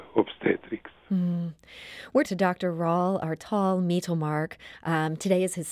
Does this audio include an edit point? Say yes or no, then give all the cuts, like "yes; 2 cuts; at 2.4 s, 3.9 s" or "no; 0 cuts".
yes; 1 cut; at 2.2 s